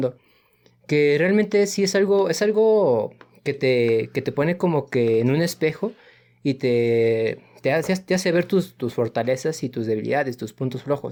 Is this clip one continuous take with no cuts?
yes; 0 cuts

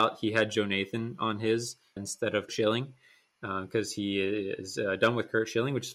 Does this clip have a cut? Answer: yes; 2 cuts; at 2.0 s, 2.5 s

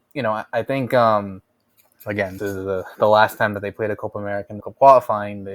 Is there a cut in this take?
yes; 2 cuts; at 2.4 s, 4.6 s

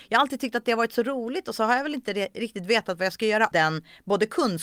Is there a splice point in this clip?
yes; 1 cut; at 3.5 s

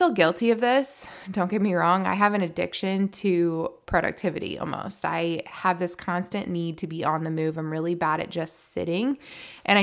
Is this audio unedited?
yes; 0 cuts

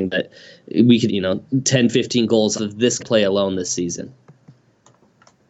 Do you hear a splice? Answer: yes; 3 cuts; at 1.1 s, 2.6 s, 3.0 s

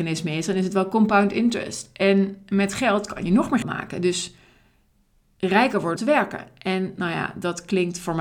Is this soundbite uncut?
no; 2 cuts; at 3.6 s, 6.0 s

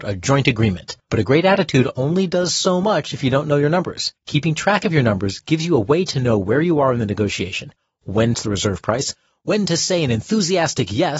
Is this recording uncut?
no; 3 cuts; at 1.0 s, 4.2 s, 8.3 s

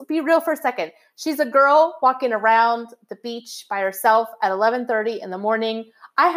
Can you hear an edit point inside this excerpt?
no; 0 cuts

